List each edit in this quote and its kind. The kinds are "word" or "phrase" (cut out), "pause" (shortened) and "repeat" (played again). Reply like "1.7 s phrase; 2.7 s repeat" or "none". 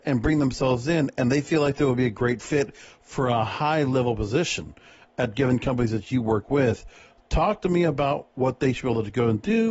none